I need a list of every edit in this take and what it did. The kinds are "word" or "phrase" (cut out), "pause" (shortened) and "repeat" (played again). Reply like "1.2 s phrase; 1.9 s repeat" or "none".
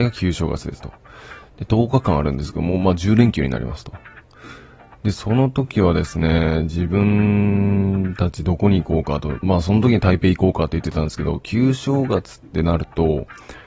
none